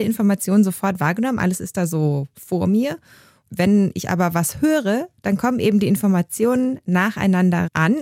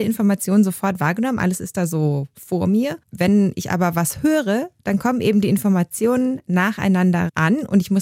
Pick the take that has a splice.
second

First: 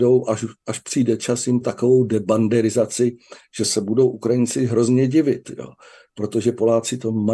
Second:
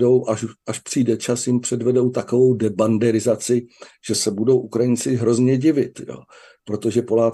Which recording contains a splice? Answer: first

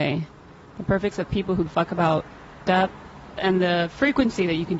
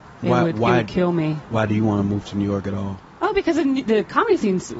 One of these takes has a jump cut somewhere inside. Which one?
first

